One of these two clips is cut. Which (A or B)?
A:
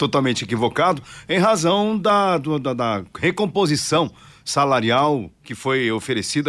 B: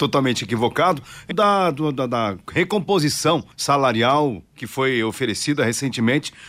B